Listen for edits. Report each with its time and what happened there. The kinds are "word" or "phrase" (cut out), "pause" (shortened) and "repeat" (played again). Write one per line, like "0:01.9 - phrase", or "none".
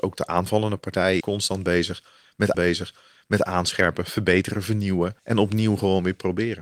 0:01.2 - word
0:02.5 - repeat
0:05.2 - pause